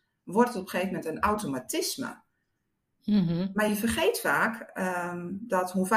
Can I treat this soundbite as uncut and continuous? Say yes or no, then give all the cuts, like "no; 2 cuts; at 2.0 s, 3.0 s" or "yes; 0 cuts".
yes; 0 cuts